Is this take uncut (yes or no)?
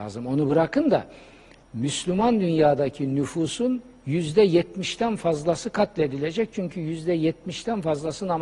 yes